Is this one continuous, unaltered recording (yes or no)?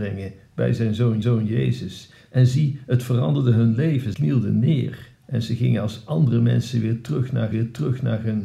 no